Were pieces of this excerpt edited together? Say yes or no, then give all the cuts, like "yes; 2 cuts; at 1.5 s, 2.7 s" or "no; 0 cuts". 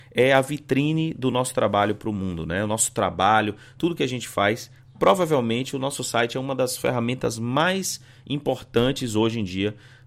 no; 0 cuts